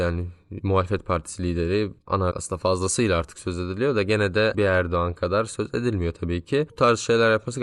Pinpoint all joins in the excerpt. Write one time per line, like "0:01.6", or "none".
0:02.3
0:04.5